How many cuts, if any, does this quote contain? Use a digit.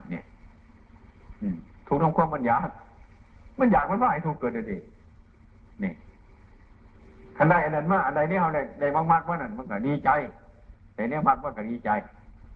0